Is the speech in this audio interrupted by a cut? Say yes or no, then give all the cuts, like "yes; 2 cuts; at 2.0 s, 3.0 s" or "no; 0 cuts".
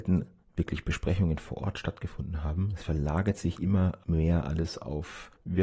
no; 0 cuts